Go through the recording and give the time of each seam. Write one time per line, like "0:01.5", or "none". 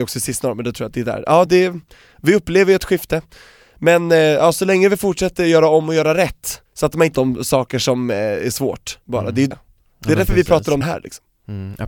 0:01.5
0:06.7
0:07.1
0:09.0
0:09.5
0:10.8